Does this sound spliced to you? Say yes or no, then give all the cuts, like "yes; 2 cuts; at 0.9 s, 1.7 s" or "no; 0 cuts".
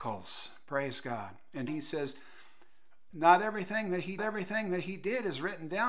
yes; 3 cuts; at 1.7 s, 3.1 s, 4.2 s